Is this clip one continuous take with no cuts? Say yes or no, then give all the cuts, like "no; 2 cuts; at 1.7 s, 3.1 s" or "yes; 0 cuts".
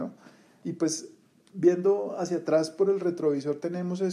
yes; 0 cuts